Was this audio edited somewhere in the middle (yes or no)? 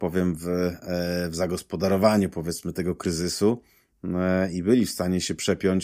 no